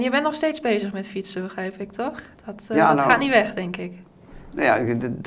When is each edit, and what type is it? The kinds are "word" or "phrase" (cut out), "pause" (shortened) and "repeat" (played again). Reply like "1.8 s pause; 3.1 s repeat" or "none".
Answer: 2.3 s pause